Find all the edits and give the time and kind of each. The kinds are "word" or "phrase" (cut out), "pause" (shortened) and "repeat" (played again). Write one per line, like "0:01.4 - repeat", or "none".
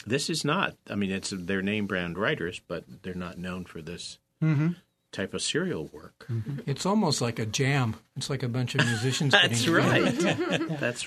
none